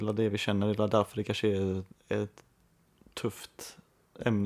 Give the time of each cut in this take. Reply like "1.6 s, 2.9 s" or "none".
none